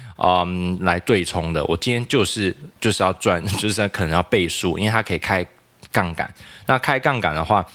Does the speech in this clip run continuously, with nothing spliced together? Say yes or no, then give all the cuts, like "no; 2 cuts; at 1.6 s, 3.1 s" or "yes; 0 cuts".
no; 1 cut; at 2.8 s